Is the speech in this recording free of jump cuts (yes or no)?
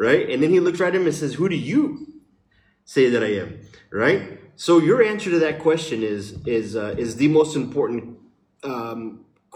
yes